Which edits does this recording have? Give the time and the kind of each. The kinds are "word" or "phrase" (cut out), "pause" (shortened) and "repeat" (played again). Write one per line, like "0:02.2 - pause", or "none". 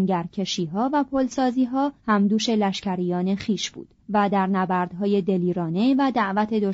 0:02.0 - pause
0:04.0 - pause